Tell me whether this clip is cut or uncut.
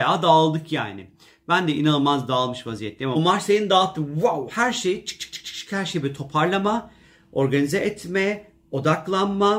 cut